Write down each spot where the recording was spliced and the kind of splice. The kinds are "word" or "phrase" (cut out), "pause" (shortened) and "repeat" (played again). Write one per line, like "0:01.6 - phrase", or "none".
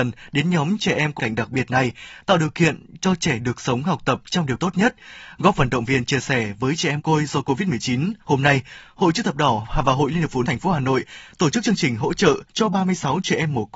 0:01.2 - word
0:04.6 - word
0:07.0 - word
0:08.2 - pause
0:10.4 - word
0:12.5 - pause